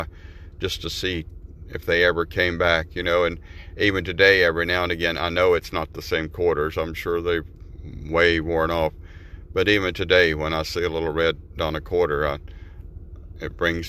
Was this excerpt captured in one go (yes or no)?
no